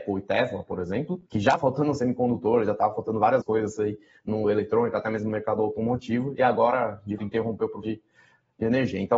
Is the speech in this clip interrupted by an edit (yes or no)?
yes